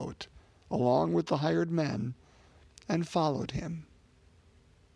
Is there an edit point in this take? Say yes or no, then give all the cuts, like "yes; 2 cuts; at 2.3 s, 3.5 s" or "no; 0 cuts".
no; 0 cuts